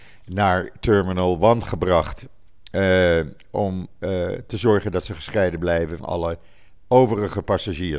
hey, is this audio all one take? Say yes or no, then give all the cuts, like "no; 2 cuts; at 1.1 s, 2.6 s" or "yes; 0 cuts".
no; 1 cut; at 6.0 s